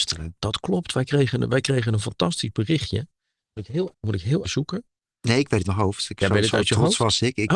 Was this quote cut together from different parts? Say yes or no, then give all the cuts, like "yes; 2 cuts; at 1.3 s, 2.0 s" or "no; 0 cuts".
yes; 4 cuts; at 3.6 s, 3.9 s, 4.4 s, 5.6 s